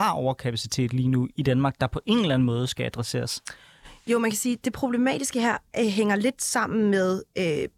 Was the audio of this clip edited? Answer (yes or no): no